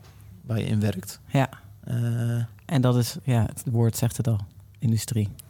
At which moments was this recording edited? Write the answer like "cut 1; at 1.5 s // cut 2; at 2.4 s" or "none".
none

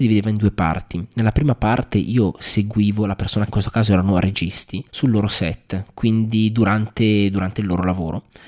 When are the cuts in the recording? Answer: cut 1; at 3.5 s // cut 2; at 4.9 s

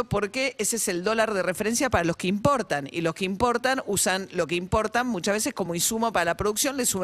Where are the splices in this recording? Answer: none

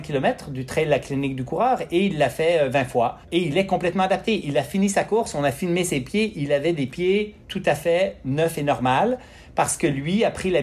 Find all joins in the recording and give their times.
cut 1; at 3.2 s // cut 2; at 7.4 s

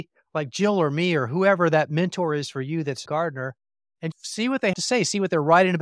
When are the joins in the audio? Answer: cut 1; at 3.1 s // cut 2; at 4.1 s // cut 3; at 4.7 s

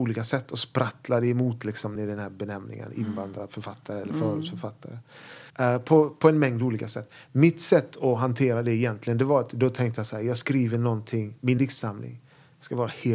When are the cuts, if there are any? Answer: cut 1; at 1.9 s // cut 2; at 5.5 s // cut 3; at 11.6 s

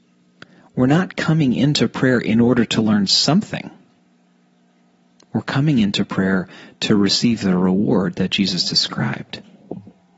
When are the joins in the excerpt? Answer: none

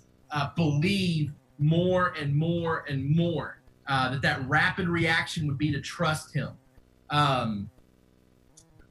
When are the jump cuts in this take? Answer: none

